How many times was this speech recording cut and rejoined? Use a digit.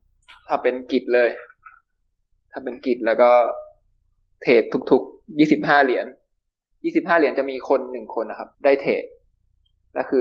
1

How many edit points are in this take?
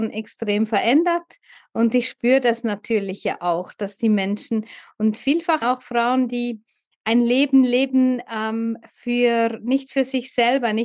2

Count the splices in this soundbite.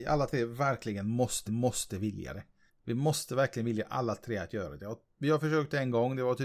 3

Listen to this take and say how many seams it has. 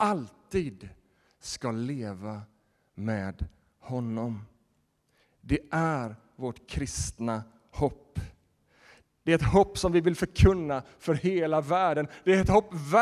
0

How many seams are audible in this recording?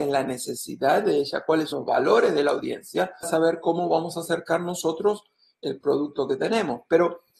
2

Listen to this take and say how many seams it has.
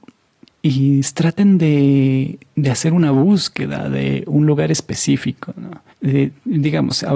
1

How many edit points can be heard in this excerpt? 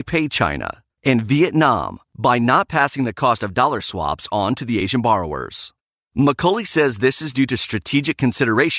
0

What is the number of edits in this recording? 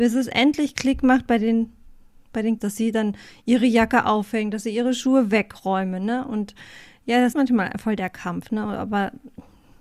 2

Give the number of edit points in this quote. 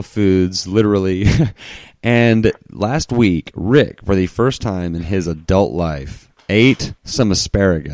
1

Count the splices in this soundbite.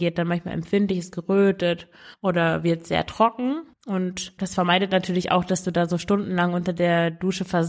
2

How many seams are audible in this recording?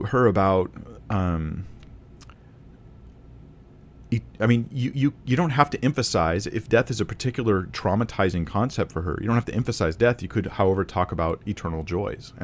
0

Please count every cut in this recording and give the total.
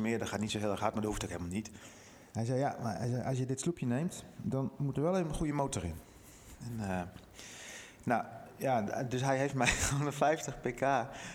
1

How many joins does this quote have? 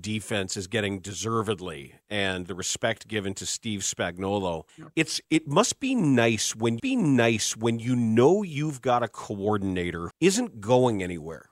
4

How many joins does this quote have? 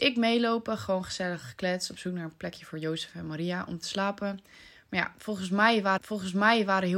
1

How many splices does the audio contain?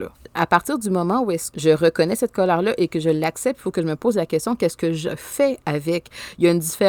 1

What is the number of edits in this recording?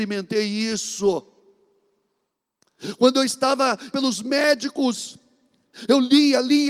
1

